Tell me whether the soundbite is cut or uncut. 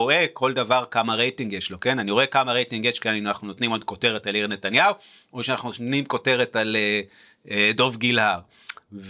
uncut